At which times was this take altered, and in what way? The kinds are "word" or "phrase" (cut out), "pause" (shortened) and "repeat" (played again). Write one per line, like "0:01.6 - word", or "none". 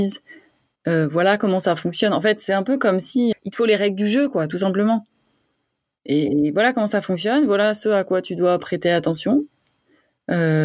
0:03.3 - word